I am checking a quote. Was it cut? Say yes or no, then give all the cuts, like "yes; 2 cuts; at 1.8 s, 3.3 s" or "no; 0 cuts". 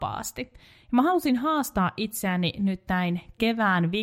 no; 0 cuts